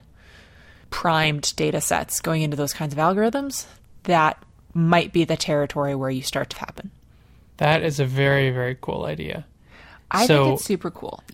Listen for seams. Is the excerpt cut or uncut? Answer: cut